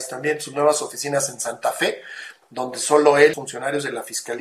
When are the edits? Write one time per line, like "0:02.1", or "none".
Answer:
0:03.3

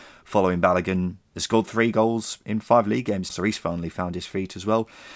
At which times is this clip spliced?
0:03.3

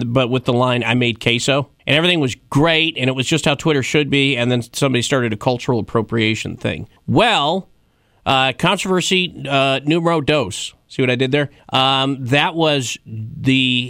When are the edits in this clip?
0:01.8
0:07.0
0:11.6

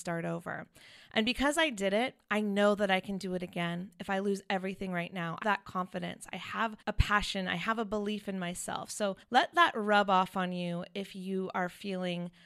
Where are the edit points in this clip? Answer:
0:05.4
0:06.8
0:09.2

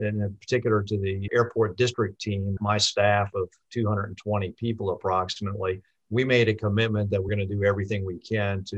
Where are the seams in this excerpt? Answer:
0:01.3
0:02.6
0:07.3

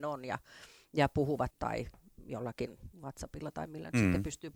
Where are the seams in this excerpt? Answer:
0:01.5
0:02.9

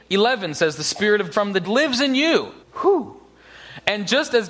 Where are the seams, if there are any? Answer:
0:01.3
0:01.6
0:02.6

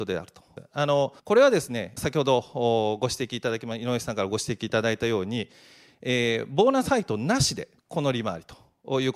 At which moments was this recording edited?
0:01.2
0:02.0
0:07.8

